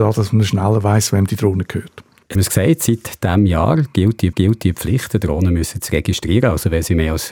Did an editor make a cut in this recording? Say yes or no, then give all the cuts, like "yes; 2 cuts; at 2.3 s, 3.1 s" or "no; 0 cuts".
yes; 2 cuts; at 2.3 s, 4.3 s